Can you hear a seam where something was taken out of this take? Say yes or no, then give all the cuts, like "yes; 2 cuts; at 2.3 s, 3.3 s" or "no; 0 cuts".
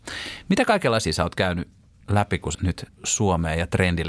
yes; 3 cuts; at 1.0 s, 2.5 s, 2.9 s